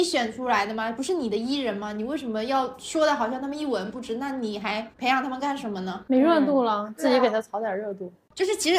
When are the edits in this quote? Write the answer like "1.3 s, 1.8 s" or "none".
4.9 s